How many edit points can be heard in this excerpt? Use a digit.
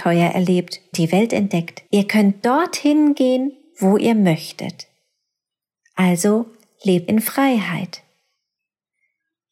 3